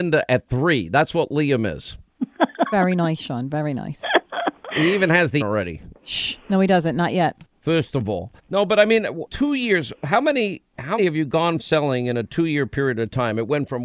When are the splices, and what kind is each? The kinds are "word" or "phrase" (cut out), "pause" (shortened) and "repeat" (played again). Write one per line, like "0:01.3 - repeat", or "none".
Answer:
0:04.7 - word
0:05.4 - word
0:08.4 - pause
0:09.3 - word
0:11.0 - word
0:11.6 - word

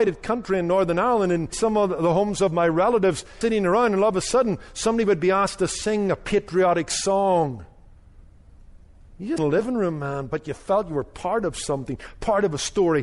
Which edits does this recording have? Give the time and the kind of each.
0:03.4 - phrase
0:09.4 - phrase

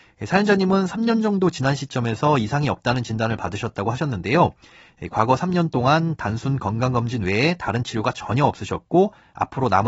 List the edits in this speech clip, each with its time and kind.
none

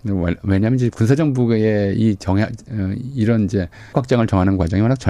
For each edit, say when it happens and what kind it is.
0:03.9 - word

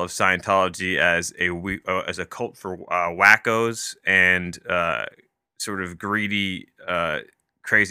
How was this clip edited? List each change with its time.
none

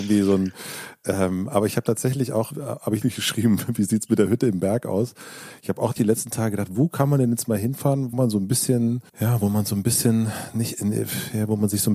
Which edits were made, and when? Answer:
0:02.5 - word
0:03.0 - phrase
0:06.0 - word
0:08.1 - word
0:09.1 - pause

